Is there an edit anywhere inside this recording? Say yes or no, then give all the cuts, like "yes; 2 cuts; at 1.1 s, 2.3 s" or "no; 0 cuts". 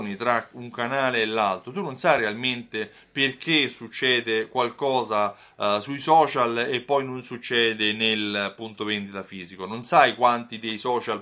no; 0 cuts